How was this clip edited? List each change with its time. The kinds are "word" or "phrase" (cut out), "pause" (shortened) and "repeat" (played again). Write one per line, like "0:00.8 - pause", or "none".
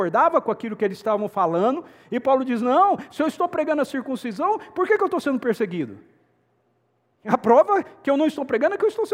none